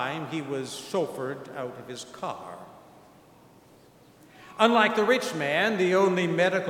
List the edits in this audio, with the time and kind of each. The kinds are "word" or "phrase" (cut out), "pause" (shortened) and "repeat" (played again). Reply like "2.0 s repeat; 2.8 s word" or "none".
none